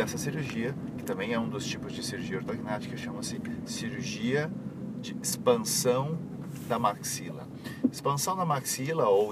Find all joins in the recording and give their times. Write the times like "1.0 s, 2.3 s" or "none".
none